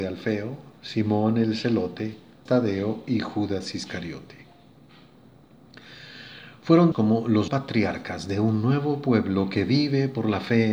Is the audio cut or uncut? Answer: cut